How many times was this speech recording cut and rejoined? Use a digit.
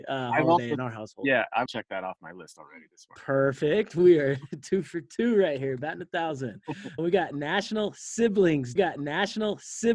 3